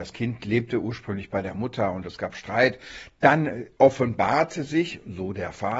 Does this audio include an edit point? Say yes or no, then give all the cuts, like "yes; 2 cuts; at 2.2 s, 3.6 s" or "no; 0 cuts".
no; 0 cuts